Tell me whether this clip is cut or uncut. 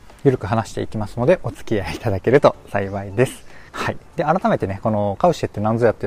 cut